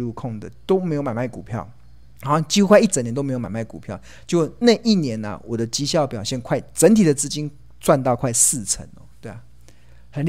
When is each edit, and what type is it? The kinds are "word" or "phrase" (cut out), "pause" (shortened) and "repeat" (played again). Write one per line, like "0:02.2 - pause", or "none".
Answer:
0:02.1 - pause